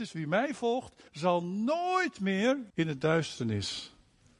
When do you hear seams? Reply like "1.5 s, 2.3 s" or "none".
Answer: 1.1 s, 2.7 s